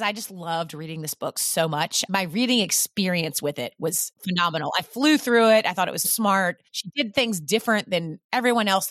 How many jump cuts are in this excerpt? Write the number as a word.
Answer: three